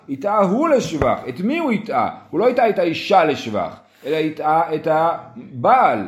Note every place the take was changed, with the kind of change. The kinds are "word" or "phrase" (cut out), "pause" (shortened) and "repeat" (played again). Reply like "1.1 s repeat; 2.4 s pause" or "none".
none